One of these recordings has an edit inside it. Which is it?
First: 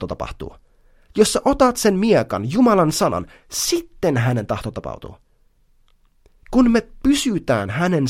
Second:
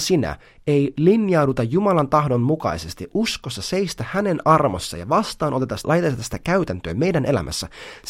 second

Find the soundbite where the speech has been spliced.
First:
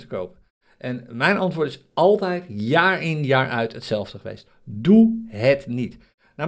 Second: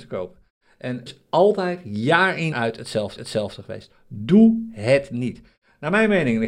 second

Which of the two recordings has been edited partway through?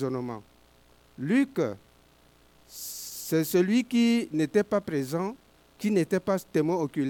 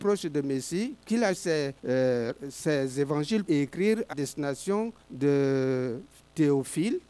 second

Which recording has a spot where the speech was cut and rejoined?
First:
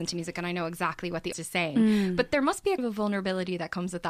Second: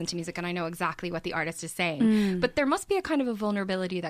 first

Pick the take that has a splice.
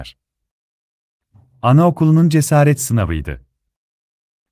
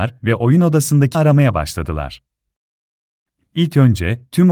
second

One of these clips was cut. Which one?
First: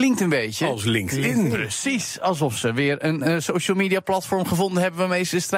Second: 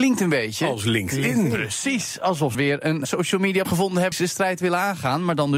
second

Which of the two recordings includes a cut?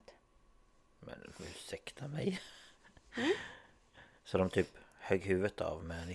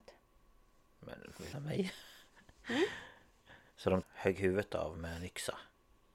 second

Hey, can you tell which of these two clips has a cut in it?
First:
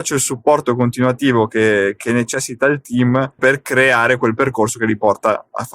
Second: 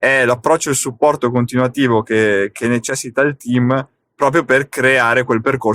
first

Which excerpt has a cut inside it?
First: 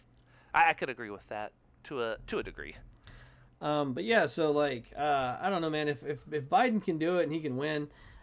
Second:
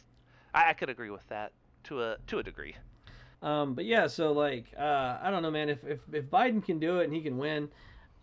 second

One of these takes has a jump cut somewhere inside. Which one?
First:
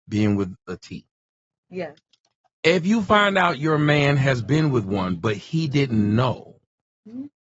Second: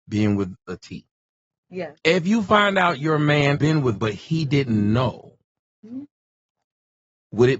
second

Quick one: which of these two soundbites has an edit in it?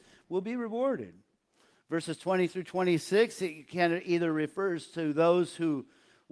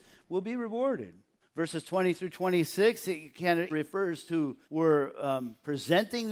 second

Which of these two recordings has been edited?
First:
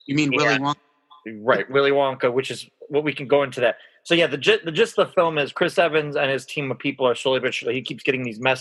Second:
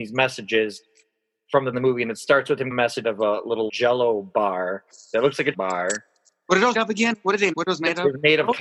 second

